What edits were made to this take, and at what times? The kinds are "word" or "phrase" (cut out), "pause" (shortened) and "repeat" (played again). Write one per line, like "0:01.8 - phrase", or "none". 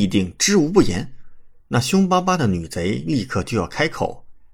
0:01.6 - pause